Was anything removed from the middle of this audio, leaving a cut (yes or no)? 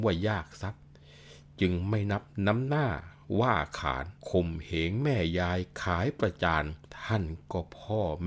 yes